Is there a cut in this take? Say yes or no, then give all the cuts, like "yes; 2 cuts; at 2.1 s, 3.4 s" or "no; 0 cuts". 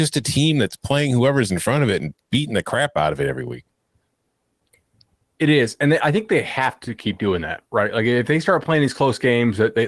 no; 0 cuts